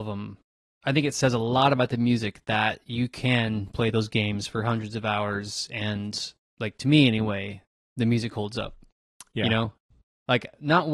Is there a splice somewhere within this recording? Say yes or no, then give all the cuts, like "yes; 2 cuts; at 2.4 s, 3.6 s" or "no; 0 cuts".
no; 0 cuts